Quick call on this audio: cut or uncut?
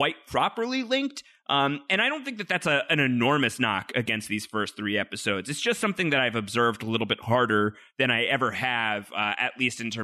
uncut